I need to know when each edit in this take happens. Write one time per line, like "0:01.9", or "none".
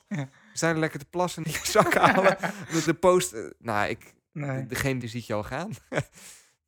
0:01.4
0:02.9
0:05.0